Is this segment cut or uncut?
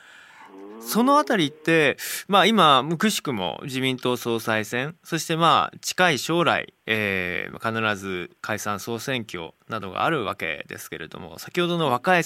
cut